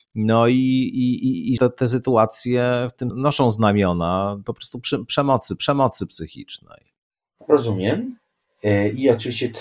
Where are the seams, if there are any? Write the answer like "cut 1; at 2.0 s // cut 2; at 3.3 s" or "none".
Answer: cut 1; at 1.6 s // cut 2; at 3.1 s // cut 3; at 4.4 s // cut 4; at 5.6 s